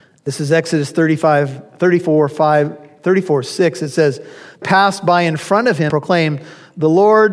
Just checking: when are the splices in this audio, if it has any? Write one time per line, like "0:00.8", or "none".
0:04.6
0:05.9